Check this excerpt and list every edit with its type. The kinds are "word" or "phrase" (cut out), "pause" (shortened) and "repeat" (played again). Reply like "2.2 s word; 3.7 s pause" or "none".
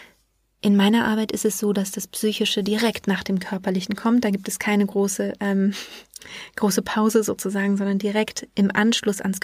none